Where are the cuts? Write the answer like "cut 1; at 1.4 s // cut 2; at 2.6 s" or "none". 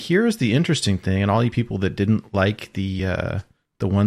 none